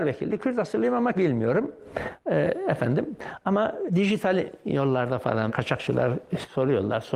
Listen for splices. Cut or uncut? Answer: cut